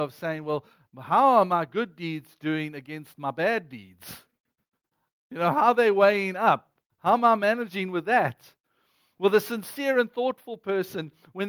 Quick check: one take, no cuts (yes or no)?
yes